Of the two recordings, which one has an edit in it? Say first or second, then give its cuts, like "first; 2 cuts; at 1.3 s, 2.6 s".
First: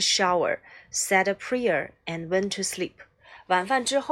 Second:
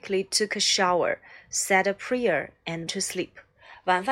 second; 1 cut; at 2.9 s